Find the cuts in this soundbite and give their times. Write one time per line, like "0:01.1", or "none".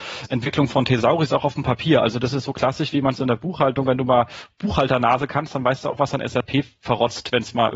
none